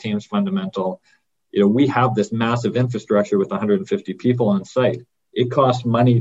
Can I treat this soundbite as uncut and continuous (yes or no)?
yes